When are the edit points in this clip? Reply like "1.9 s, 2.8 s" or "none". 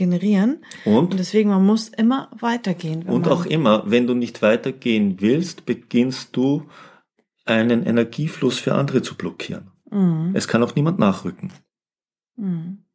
none